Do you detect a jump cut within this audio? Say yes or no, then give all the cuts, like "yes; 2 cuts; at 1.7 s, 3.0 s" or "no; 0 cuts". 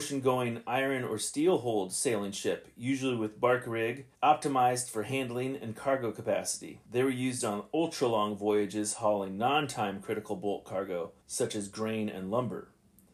yes; 3 cuts; at 4.1 s, 6.9 s, 11.2 s